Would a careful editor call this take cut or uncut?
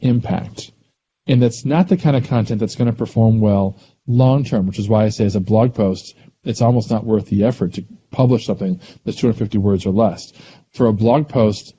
uncut